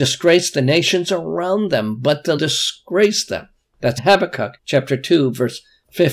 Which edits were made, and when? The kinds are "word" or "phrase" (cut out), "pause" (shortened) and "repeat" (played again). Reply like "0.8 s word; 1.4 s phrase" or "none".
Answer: 2.4 s phrase; 4.0 s word; 4.6 s pause